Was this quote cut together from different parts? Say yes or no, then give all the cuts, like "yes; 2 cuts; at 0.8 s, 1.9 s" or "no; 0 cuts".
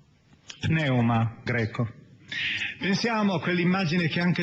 yes; 1 cut; at 1.5 s